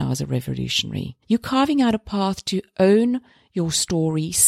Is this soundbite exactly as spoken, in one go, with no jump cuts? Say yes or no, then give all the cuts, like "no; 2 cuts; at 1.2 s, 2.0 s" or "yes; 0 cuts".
no; 1 cut; at 1.2 s